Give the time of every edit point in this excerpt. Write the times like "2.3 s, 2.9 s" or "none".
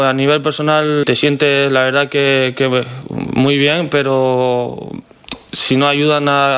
1.0 s